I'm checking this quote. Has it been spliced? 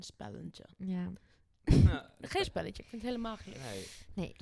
yes; 1 cut; at 2.4 s

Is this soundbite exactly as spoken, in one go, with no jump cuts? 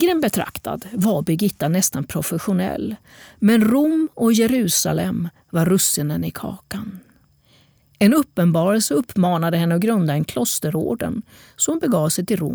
yes; 0 cuts

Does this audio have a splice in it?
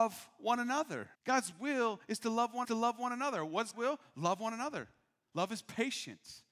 yes; 3 cuts; at 1.1 s, 2.6 s, 3.7 s

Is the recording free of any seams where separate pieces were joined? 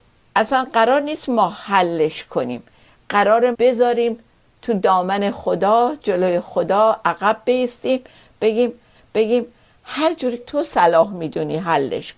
no; 3 cuts; at 3.5 s, 8.9 s, 10.4 s

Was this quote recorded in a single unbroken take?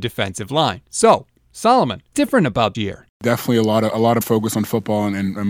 no; 3 cuts; at 2.1 s, 2.7 s, 4.2 s

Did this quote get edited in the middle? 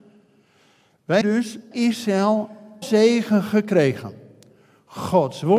yes; 3 cuts; at 1.2 s, 1.7 s, 2.8 s

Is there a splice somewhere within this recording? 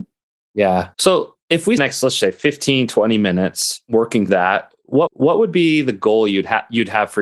yes; 5 cuts; at 0.9 s, 1.8 s, 2.2 s, 4.3 s, 5.1 s

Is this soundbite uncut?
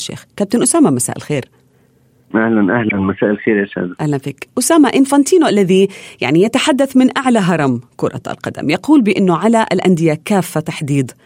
yes; 0 cuts

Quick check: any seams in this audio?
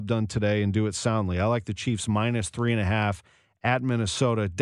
no; 0 cuts

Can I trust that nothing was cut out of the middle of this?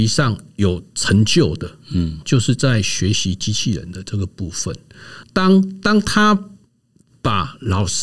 no; 2 cuts; at 2.2 s, 5.2 s

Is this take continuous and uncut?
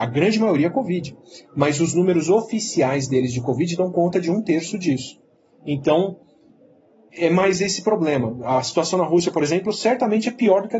yes; 0 cuts

